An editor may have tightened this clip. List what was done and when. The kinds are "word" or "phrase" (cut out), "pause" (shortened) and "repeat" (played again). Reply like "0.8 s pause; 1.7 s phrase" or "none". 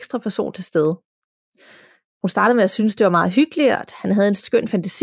none